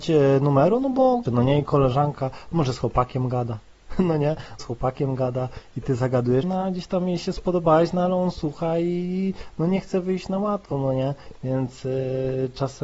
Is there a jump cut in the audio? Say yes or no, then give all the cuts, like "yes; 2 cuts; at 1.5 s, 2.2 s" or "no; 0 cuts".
yes; 3 cuts; at 1.2 s, 4.6 s, 6.4 s